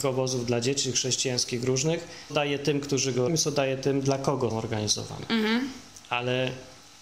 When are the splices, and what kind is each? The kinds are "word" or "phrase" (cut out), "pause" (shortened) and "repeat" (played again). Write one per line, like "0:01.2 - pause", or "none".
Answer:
0:02.3 - word
0:03.3 - word
0:04.5 - word